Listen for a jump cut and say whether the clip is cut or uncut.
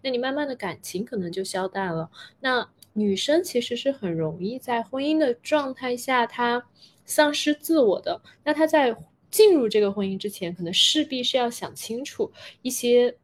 uncut